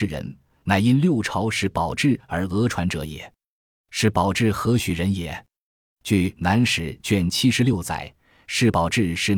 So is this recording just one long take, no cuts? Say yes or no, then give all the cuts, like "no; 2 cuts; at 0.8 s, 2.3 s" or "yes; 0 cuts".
yes; 0 cuts